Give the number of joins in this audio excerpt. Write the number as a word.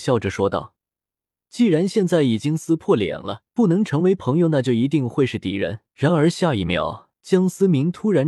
three